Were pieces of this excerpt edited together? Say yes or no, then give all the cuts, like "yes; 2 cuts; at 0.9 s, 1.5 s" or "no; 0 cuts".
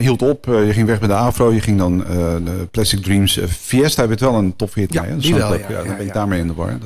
yes; 1 cut; at 4.9 s